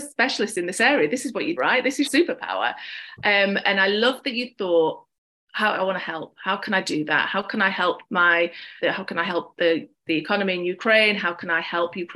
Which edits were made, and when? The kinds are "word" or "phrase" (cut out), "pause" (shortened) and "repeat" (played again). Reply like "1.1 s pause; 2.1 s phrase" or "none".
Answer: 1.6 s word; 2.0 s word; 5.7 s word; 8.8 s word